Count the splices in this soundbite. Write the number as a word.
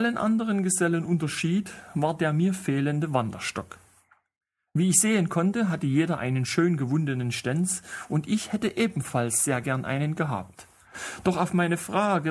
zero